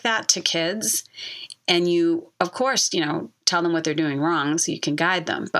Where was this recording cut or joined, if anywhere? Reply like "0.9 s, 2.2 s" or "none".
none